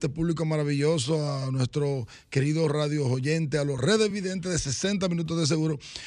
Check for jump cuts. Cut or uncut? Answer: uncut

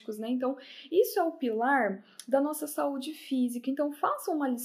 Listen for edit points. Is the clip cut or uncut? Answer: uncut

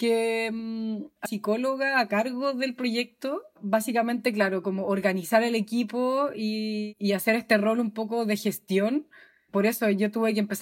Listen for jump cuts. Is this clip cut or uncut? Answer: cut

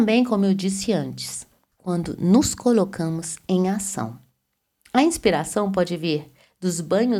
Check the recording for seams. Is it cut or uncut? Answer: uncut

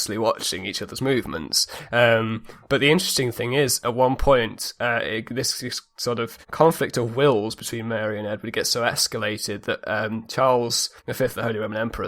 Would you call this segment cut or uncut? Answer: cut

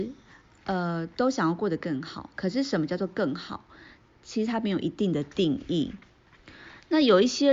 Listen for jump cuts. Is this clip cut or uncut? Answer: uncut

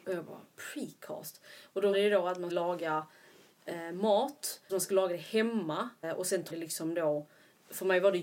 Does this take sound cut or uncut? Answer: cut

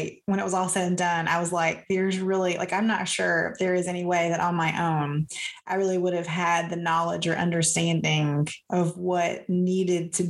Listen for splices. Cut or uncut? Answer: uncut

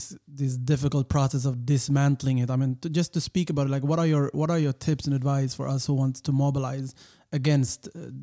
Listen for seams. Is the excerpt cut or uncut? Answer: uncut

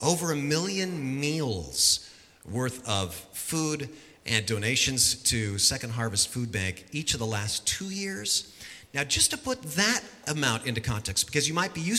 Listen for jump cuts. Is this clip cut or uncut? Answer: uncut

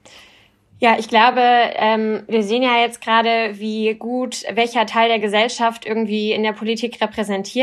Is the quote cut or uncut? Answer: uncut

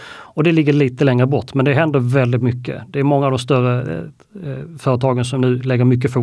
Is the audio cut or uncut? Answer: uncut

